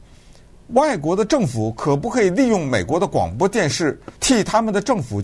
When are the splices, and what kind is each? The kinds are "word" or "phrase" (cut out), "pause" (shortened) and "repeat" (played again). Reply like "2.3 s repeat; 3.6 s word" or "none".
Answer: 4.2 s pause